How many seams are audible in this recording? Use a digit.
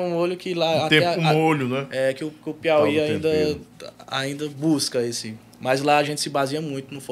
0